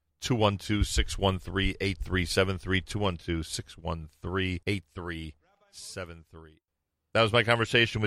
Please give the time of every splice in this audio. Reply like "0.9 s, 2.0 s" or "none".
4.6 s